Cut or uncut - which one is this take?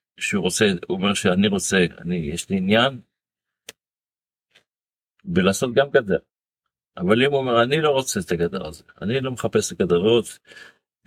uncut